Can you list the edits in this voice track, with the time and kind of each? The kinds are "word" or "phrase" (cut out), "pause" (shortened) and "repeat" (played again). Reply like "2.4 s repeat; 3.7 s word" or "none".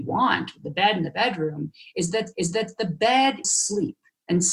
2.3 s repeat; 3.4 s word